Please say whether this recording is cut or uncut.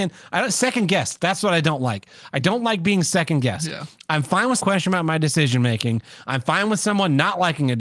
cut